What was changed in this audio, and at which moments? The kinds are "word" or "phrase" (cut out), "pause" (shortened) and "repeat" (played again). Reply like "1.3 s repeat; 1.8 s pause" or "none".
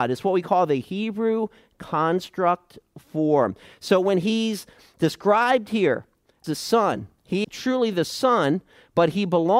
6.4 s word; 7.4 s word